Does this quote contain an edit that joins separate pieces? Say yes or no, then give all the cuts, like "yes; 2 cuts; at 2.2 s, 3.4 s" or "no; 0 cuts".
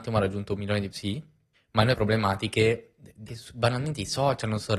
yes; 4 cuts; at 0.9 s, 1.5 s, 1.9 s, 3.3 s